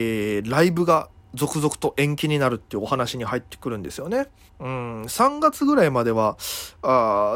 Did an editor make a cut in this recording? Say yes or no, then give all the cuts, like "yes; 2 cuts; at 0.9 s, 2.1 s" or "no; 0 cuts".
yes; 1 cut; at 4.5 s